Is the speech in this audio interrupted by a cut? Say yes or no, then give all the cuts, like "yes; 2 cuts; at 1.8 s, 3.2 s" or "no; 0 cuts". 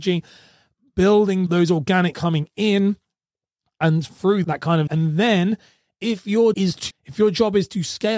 yes; 7 cuts; at 1.5 s, 2.1 s, 4.1 s, 4.4 s, 4.9 s, 6.5 s, 6.9 s